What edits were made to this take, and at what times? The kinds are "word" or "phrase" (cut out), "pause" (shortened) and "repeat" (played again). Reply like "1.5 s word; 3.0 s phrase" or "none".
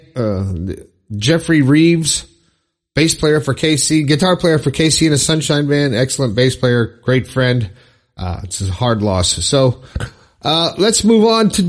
none